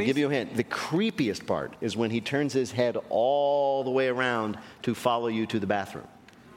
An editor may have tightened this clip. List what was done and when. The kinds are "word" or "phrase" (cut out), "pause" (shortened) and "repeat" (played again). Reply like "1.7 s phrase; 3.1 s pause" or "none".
none